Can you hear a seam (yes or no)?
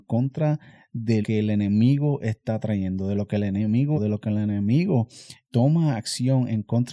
yes